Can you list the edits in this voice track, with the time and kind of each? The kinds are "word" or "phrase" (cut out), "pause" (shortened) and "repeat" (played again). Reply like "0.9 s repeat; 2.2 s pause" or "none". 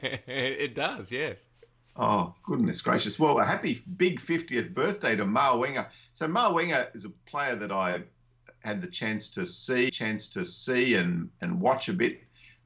9.9 s repeat